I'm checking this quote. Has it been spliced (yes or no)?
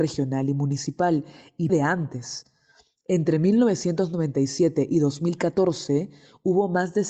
yes